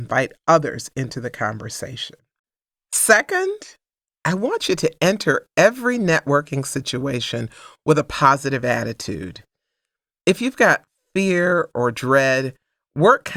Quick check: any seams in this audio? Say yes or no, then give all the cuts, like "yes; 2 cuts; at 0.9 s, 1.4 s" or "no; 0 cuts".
no; 0 cuts